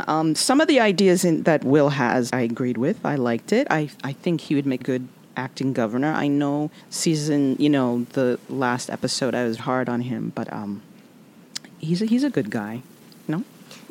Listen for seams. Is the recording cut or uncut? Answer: cut